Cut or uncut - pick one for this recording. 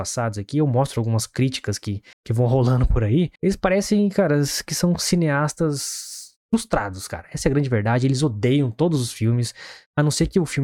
cut